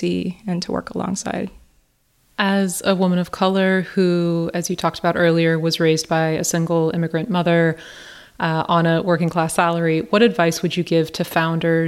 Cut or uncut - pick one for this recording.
uncut